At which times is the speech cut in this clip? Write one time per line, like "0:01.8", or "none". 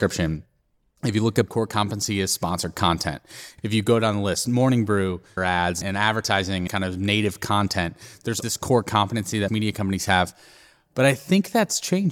0:01.5
0:05.4
0:05.8
0:06.7
0:08.4
0:09.5